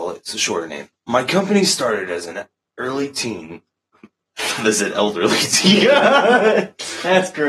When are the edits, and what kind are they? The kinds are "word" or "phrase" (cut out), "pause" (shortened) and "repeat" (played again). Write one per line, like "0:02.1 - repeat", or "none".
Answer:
0:01.0 - pause